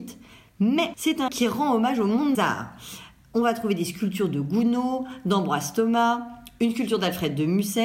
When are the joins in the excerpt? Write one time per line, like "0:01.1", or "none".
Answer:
0:00.9
0:01.3
0:02.3